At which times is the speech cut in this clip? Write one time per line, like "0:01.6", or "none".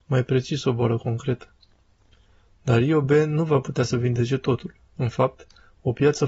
none